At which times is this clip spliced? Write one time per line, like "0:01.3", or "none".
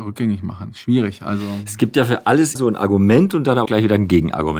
0:02.6
0:03.7